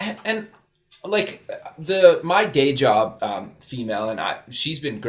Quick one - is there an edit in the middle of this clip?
yes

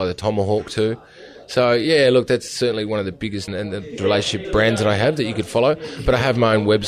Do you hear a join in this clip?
yes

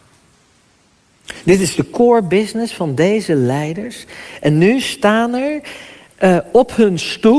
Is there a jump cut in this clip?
no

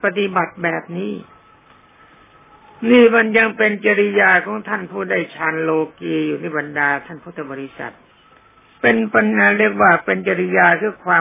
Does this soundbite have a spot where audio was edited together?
yes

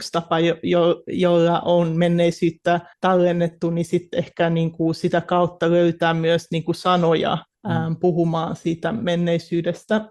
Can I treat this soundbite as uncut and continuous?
no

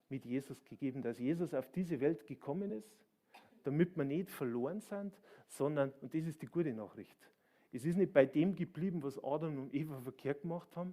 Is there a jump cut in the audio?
no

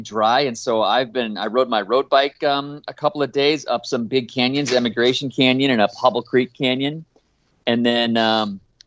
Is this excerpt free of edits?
yes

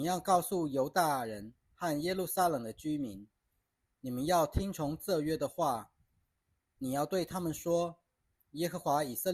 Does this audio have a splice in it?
no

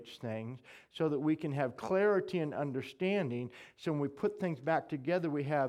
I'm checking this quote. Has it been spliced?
no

